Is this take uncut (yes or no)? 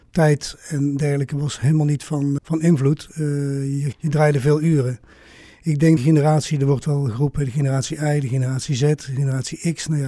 no